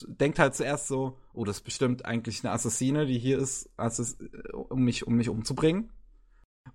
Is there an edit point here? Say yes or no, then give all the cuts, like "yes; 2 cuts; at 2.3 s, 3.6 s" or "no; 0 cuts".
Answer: no; 0 cuts